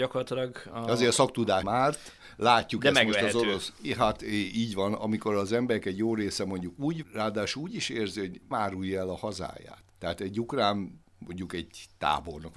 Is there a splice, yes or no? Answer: yes